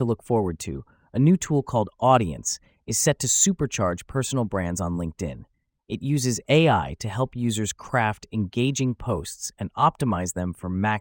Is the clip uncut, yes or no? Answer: yes